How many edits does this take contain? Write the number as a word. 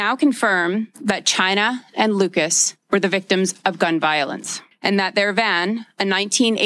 zero